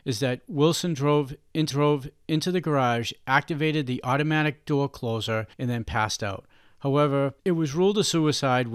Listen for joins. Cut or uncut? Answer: cut